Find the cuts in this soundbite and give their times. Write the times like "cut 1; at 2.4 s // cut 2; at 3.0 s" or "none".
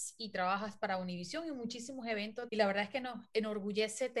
cut 1; at 2.5 s